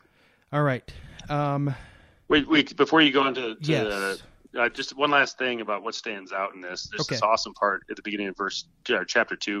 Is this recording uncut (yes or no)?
yes